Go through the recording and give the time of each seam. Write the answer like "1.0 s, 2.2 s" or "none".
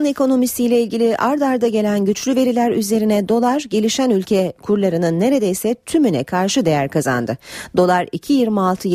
none